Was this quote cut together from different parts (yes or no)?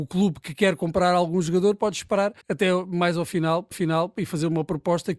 yes